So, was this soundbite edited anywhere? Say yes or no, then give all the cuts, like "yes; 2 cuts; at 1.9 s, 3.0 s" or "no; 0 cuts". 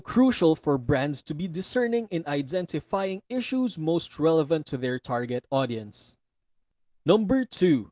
no; 0 cuts